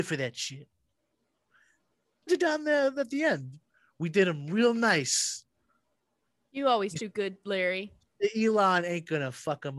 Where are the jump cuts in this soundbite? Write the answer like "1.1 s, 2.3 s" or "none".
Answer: 2.3 s